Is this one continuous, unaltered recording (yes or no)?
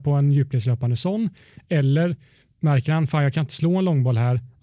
yes